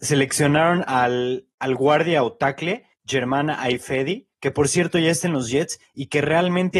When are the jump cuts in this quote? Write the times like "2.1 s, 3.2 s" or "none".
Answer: 2.9 s, 4.3 s